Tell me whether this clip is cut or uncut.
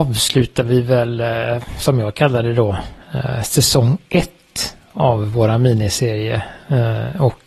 uncut